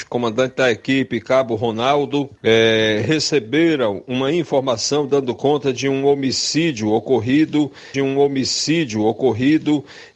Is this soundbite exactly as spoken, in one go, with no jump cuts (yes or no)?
no